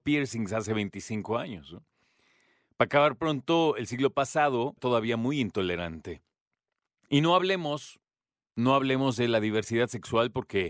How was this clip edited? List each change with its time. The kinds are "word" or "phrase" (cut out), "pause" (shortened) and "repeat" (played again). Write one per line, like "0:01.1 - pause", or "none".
0:04.8 - word